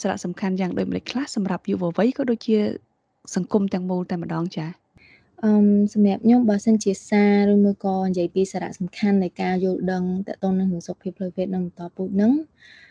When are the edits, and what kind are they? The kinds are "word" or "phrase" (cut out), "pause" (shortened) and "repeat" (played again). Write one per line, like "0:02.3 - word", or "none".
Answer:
none